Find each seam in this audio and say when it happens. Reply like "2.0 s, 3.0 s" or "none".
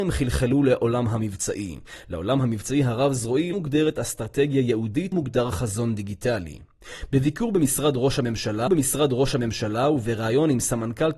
3.5 s, 5.1 s, 8.7 s